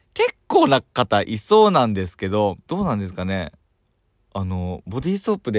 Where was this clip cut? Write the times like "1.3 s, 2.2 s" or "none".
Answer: 2.6 s

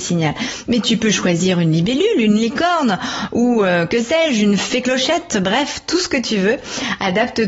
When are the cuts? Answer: none

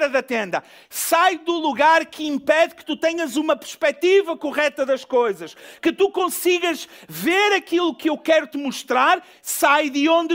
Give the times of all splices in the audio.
none

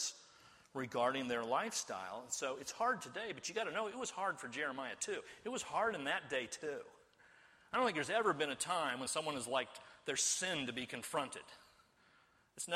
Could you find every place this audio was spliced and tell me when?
none

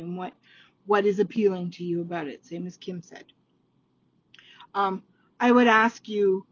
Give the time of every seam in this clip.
none

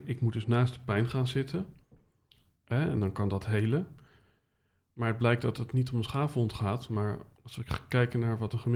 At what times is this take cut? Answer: none

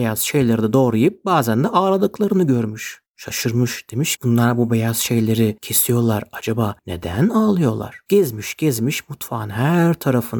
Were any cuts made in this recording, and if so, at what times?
4.2 s

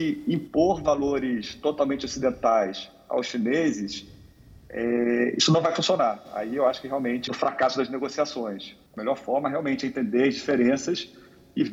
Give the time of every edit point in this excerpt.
7.3 s, 8.9 s

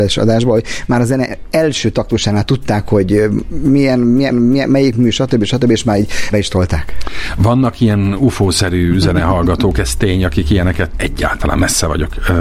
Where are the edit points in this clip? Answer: 4.3 s, 6.3 s, 10.9 s

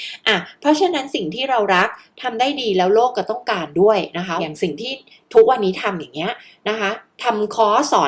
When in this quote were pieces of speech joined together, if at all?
none

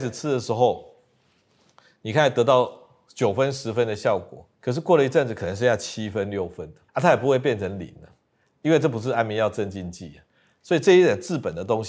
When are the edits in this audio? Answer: 4.5 s, 6.9 s

